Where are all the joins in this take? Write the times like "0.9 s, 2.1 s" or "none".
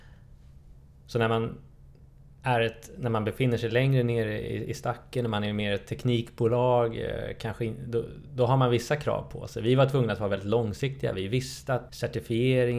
11.9 s